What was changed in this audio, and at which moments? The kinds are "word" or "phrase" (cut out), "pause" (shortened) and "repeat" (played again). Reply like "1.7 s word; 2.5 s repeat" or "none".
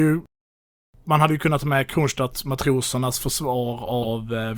none